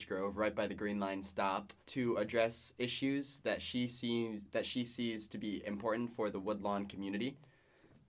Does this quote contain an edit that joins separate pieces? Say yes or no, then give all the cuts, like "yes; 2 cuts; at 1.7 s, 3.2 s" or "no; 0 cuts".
yes; 1 cut; at 1.8 s